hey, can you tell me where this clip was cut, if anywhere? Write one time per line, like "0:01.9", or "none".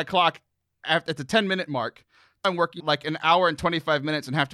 0:02.4
0:02.8